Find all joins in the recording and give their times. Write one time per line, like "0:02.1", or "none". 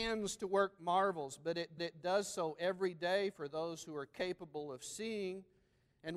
0:01.8